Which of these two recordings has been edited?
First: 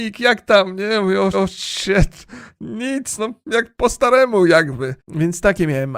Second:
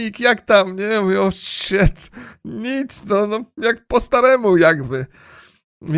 first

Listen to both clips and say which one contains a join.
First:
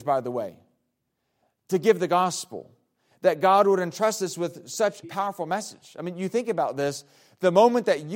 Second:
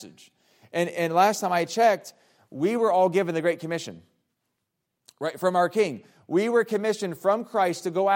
first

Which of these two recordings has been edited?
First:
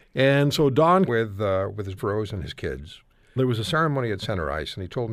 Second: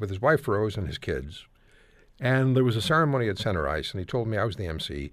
first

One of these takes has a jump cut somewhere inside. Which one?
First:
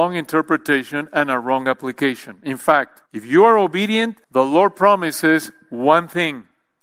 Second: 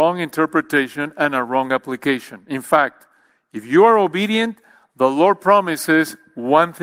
first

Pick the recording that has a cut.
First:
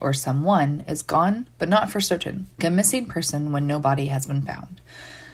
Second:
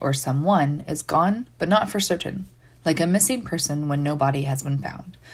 first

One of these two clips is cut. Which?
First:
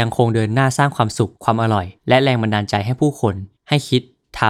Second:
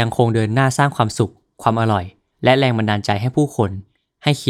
first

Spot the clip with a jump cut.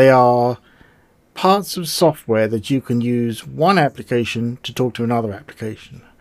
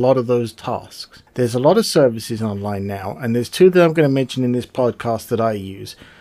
second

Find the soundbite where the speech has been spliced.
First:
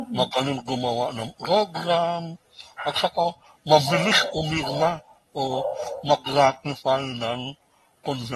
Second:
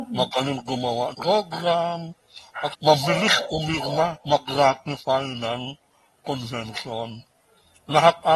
second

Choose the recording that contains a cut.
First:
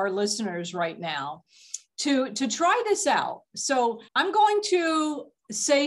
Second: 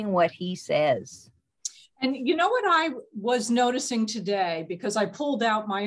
first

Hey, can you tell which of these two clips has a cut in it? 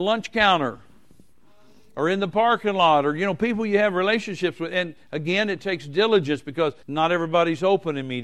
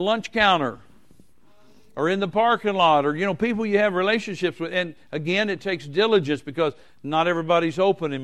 first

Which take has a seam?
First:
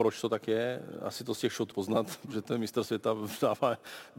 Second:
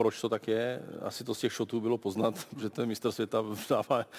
first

